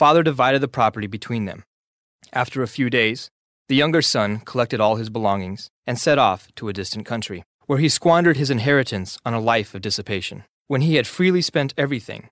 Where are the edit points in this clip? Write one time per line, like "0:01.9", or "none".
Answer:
0:05.7
0:07.5
0:10.5